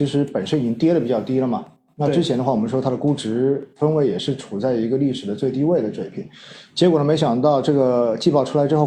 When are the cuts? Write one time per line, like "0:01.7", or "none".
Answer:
none